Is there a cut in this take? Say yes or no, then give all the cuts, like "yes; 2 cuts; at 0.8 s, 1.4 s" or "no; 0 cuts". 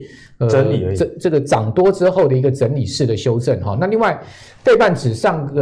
no; 0 cuts